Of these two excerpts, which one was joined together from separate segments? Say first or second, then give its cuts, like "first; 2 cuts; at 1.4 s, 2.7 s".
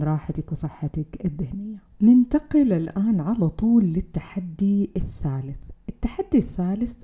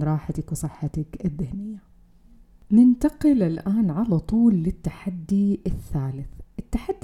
first; 1 cut; at 1.9 s